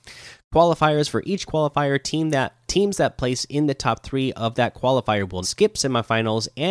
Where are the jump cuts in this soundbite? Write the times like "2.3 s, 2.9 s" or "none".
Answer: 2.7 s, 5.4 s